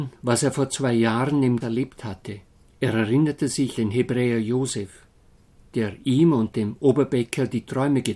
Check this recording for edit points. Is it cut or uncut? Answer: cut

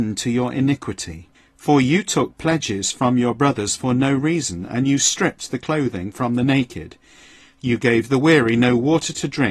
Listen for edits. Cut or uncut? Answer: cut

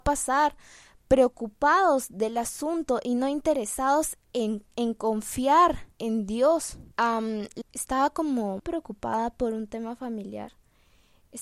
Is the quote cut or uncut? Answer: cut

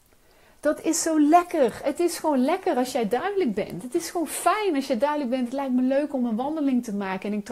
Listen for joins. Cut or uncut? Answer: uncut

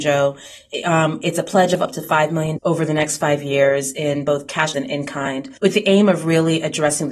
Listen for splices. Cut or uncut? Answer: cut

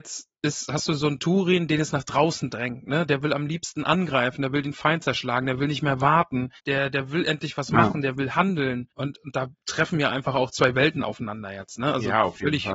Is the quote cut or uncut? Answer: cut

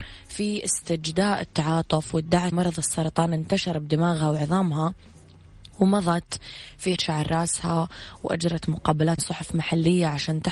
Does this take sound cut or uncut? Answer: cut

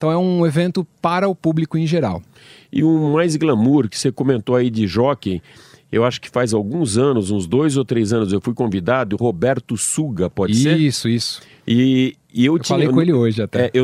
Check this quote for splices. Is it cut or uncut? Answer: uncut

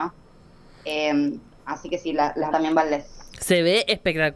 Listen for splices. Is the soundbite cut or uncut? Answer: cut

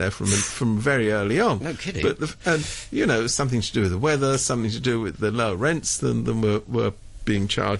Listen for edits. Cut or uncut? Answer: uncut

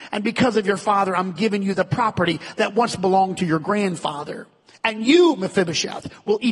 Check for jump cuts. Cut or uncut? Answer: uncut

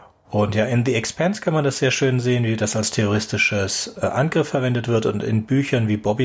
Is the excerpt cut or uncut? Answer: uncut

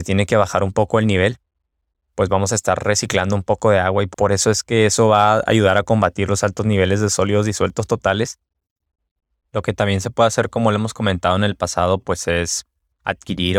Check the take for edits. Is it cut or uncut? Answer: uncut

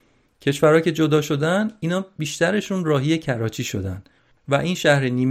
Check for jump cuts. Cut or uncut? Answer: uncut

